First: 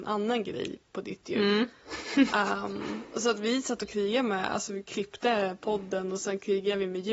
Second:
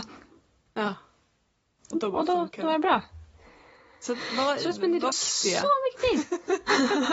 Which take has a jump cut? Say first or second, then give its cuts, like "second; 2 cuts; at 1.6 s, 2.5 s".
second; 1 cut; at 5.1 s